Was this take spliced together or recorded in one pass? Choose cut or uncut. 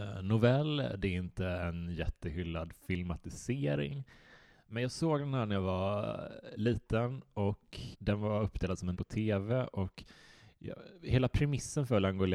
cut